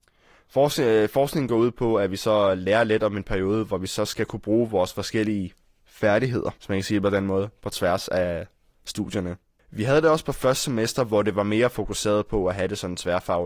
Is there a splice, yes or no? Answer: no